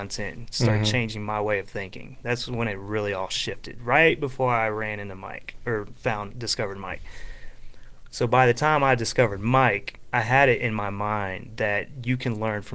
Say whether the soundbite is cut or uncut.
uncut